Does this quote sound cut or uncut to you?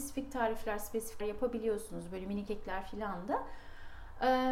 cut